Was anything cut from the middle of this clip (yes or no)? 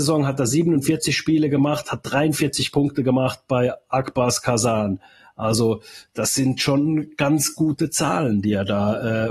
no